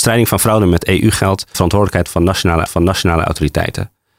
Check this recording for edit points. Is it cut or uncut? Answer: cut